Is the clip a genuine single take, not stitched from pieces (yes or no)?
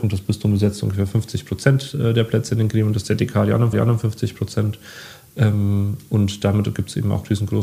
no